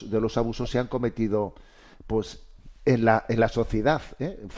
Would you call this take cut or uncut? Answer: uncut